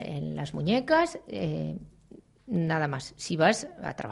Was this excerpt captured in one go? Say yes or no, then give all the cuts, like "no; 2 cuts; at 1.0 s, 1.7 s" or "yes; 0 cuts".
yes; 0 cuts